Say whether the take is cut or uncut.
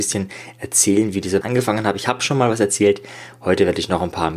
cut